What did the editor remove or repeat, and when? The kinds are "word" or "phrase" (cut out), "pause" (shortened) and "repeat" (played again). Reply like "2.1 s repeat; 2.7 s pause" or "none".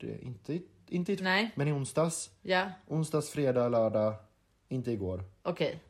1.2 s word